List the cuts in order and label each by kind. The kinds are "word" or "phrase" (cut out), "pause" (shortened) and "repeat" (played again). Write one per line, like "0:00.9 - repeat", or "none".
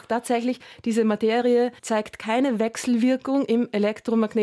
0:01.8 - pause